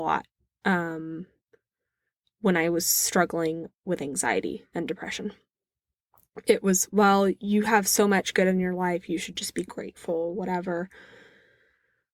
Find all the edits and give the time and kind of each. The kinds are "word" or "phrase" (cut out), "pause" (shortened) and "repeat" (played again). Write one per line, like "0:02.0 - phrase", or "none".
none